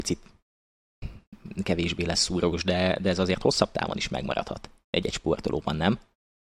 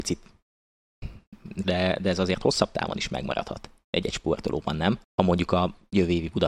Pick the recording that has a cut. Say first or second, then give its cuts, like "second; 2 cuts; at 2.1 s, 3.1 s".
second; 2 cuts; at 1.6 s, 5.0 s